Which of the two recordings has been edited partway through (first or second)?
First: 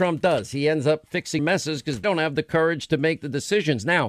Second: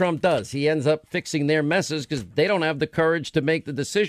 first